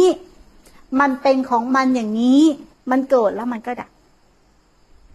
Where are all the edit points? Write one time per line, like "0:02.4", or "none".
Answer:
0:02.7